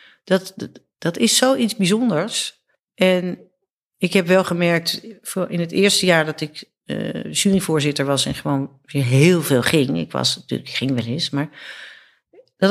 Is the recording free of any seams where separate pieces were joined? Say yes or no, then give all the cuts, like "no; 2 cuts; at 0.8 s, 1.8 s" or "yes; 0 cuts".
no; 2 cuts; at 2.7 s, 6.8 s